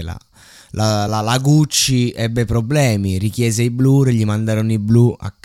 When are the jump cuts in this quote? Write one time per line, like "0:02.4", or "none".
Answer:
none